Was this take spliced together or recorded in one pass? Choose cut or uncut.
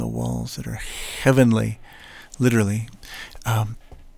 uncut